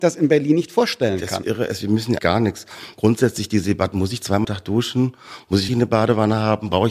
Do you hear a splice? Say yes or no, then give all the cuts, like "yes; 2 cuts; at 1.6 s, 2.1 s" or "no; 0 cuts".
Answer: yes; 3 cuts; at 2.2 s, 4.4 s, 5.7 s